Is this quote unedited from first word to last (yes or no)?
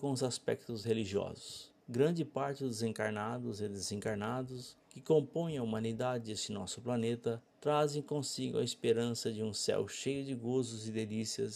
no